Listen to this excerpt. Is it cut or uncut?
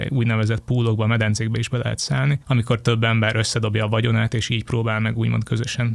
cut